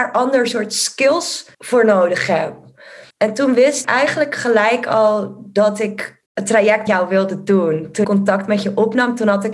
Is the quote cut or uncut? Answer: cut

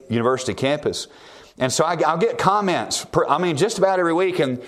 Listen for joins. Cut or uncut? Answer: uncut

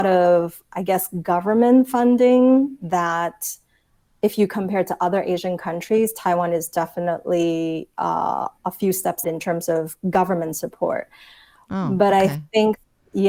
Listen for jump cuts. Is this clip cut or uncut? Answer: cut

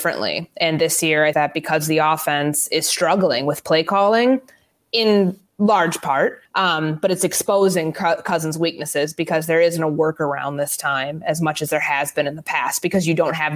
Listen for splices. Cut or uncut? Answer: cut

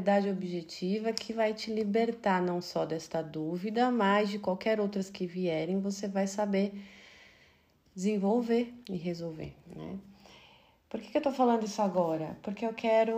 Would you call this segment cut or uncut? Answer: uncut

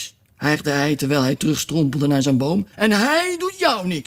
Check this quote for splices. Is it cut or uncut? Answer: cut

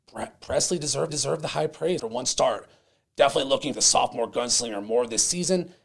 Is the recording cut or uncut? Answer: cut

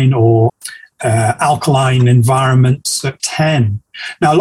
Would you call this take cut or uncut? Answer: cut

